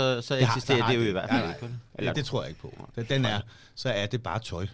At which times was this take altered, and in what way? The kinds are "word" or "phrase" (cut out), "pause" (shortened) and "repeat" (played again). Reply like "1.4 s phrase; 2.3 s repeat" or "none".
2.1 s word